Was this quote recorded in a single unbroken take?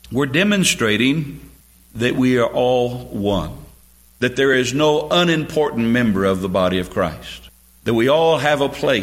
yes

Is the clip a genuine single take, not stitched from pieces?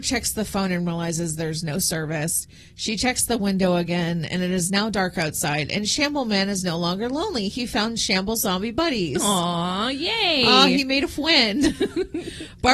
yes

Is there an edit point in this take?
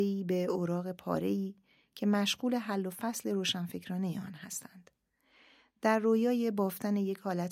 no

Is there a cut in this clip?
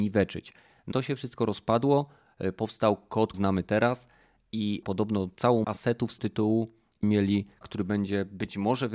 yes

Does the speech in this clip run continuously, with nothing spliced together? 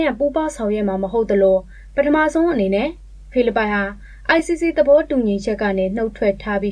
yes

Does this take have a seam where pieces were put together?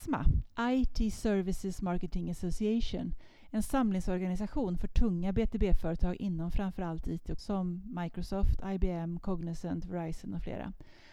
yes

